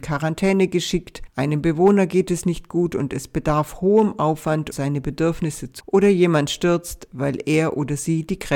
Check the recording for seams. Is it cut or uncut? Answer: cut